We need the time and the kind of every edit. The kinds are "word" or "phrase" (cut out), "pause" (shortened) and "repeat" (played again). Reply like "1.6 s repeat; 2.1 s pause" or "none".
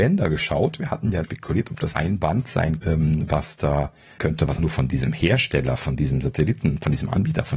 1.2 s word; 1.9 s word; 2.8 s word; 4.2 s phrase; 4.6 s word